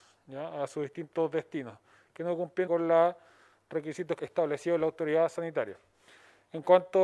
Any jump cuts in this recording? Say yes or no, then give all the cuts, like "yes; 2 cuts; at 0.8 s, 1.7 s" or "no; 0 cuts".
yes; 2 cuts; at 2.7 s, 4.2 s